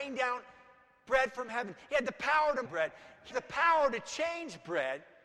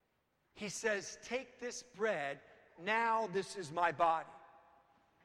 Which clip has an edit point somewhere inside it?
first; 2 cuts; at 2.6 s, 3.3 s

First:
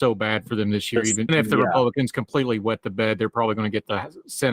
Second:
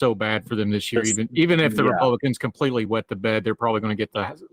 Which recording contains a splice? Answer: first; 1 cut; at 1.3 s

